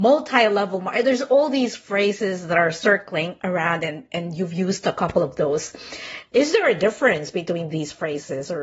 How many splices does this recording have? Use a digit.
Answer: 1